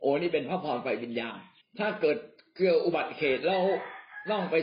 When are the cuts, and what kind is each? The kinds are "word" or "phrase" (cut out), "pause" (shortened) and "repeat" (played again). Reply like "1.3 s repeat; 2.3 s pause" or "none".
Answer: 1.6 s pause